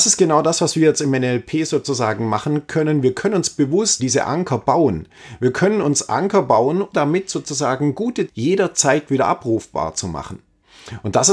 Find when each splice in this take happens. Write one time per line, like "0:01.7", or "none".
0:04.0
0:06.9
0:08.3